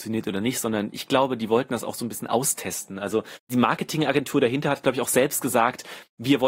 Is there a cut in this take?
no; 0 cuts

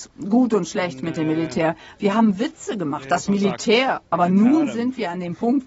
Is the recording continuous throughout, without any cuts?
yes; 0 cuts

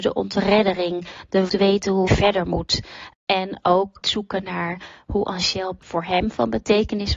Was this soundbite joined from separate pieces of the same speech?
yes; 4 cuts; at 1.5 s, 2.1 s, 3.1 s, 4.0 s

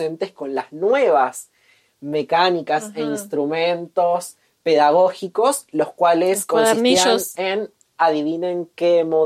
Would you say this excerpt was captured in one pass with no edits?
yes; 0 cuts

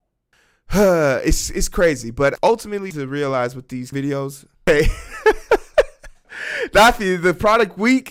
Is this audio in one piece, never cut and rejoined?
no; 4 cuts; at 2.4 s, 2.9 s, 3.9 s, 4.5 s

